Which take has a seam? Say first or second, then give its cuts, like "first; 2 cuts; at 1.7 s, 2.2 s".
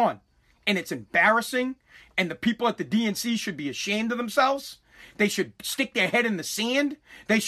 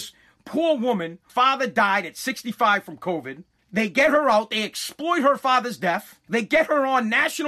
second; 3 cuts; at 1.3 s, 3.6 s, 6.2 s